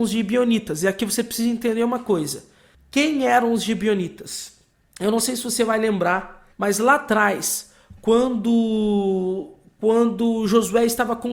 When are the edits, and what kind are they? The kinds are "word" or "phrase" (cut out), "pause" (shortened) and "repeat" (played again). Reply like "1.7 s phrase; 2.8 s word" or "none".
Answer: 2.7 s pause; 4.7 s pause; 6.5 s pause